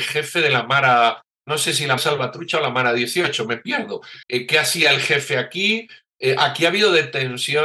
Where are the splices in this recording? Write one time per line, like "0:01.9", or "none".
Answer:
0:02.0
0:04.2